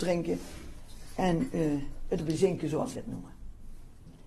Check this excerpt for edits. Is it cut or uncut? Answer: cut